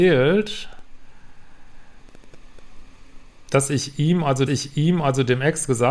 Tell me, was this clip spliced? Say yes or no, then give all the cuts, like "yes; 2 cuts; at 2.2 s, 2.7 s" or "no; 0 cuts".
yes; 1 cut; at 4.5 s